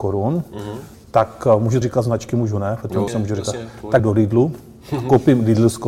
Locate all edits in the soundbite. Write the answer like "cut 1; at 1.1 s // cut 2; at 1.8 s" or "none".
cut 1; at 1.8 s // cut 2; at 3.1 s // cut 3; at 4.0 s